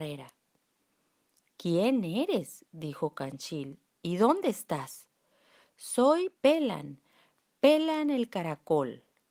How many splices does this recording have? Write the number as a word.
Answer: one